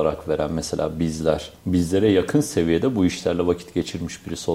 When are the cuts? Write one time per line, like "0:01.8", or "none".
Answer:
0:01.6